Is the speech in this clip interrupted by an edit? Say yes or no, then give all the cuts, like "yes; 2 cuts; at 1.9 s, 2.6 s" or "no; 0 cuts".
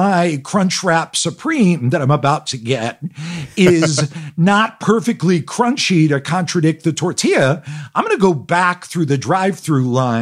no; 0 cuts